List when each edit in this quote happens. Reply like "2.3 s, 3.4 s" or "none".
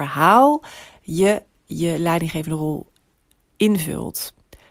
none